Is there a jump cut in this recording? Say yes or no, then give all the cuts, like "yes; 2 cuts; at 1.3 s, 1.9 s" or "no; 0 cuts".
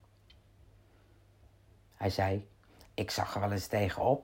no; 0 cuts